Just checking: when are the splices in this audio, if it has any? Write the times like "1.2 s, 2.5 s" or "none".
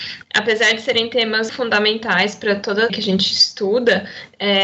1.5 s, 2.9 s

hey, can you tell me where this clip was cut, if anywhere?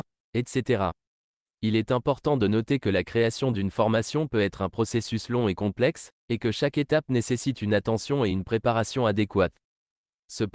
none

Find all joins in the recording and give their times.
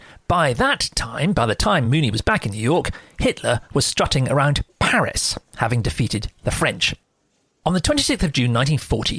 none

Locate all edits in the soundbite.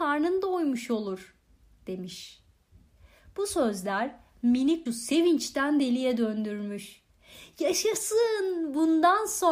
4.9 s

